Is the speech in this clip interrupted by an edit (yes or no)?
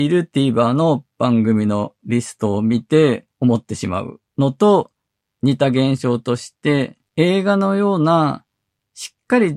yes